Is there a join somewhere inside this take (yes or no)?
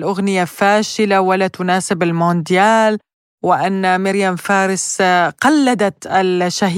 no